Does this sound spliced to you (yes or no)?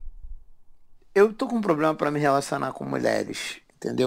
no